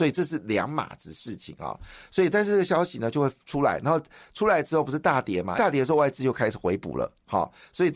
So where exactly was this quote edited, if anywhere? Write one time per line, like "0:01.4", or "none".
0:05.6